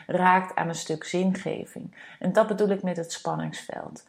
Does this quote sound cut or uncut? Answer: uncut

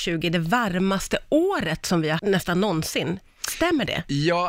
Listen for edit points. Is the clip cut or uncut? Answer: cut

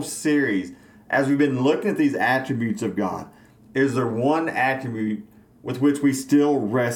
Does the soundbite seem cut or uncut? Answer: uncut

